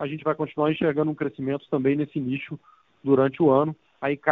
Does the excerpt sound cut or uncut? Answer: uncut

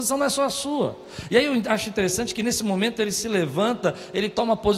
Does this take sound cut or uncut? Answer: uncut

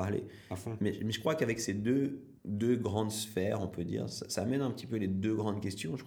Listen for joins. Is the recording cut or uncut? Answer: cut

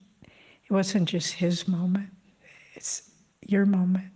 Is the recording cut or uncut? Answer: uncut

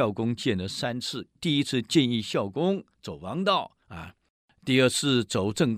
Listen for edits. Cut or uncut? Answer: cut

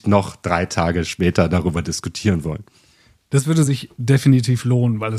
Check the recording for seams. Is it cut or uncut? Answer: uncut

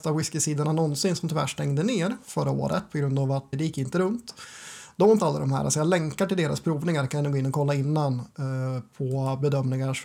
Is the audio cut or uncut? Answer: cut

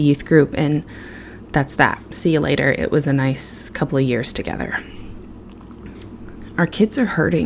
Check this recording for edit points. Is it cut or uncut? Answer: uncut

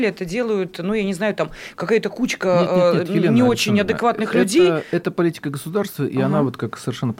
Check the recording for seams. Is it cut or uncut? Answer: uncut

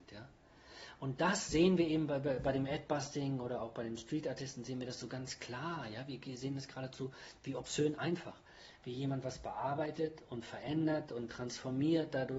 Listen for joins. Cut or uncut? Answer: uncut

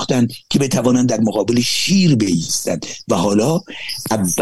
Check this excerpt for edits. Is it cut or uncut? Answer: uncut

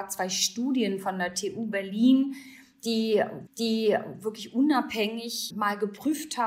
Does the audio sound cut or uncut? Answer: cut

